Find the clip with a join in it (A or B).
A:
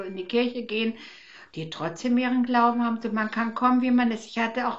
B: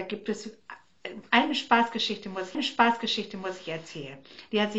B